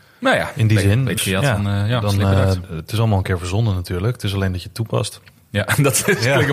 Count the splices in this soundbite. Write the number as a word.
one